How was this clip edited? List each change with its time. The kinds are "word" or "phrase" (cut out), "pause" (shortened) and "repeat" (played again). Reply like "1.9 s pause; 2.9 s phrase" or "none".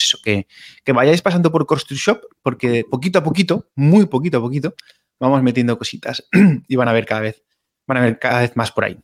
none